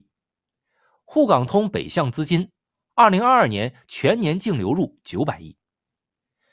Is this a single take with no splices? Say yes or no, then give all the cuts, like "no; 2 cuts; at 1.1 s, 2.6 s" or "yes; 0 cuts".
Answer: yes; 0 cuts